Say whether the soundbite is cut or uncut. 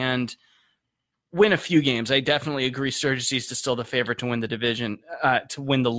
uncut